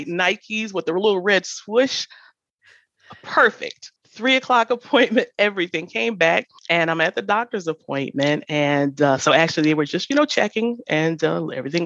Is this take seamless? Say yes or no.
no